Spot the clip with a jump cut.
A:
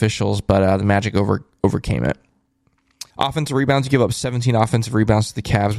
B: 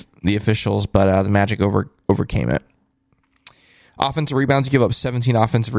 A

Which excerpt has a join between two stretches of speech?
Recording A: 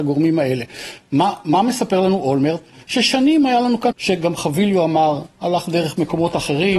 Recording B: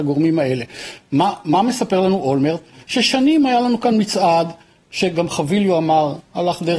A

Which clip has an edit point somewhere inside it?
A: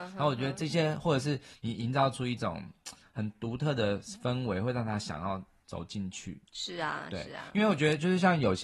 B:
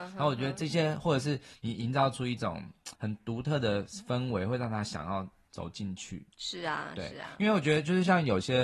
B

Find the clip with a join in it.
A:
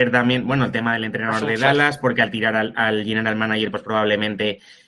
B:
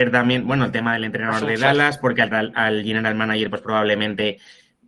B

